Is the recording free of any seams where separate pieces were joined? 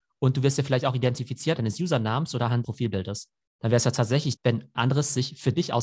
no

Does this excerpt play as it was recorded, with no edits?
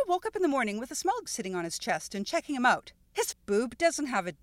no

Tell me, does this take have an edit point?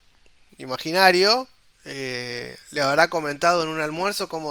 yes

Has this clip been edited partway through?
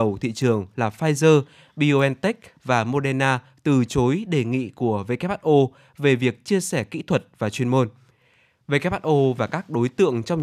no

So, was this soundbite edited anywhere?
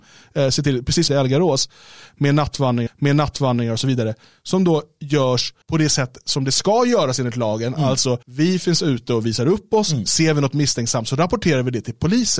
yes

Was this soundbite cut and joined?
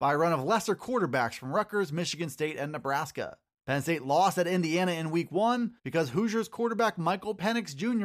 yes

